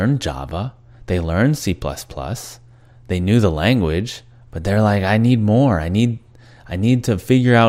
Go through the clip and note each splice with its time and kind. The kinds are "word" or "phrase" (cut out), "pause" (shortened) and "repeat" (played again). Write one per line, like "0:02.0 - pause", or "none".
none